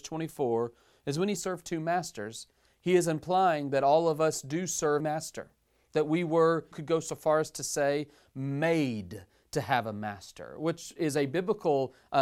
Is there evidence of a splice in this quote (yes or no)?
yes